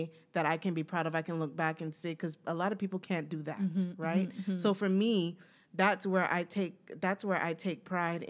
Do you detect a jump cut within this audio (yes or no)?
no